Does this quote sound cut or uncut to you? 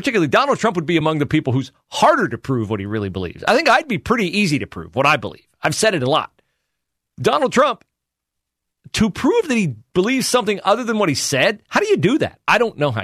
uncut